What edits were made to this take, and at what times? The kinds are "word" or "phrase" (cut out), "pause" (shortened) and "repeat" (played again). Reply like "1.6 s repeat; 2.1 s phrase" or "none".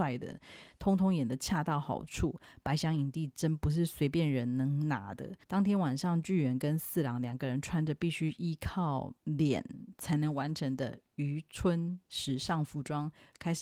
5.4 s pause; 9.2 s pause; 12.1 s pause